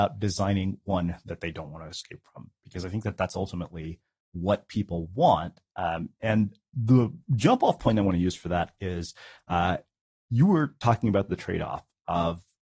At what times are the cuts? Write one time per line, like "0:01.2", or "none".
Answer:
none